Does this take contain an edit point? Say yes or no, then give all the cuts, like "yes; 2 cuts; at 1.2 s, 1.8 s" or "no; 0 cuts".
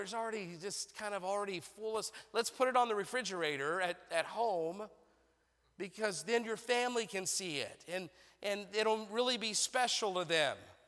no; 0 cuts